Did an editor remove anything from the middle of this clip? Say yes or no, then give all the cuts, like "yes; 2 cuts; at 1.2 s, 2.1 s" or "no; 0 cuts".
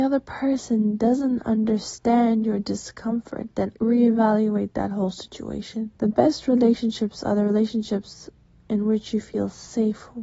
yes; 2 cuts; at 3.8 s, 6.0 s